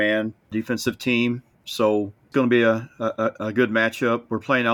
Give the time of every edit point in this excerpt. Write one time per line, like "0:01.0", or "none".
0:02.3
0:03.4